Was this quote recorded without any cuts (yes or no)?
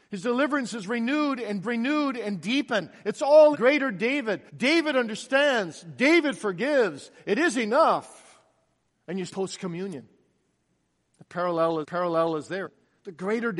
no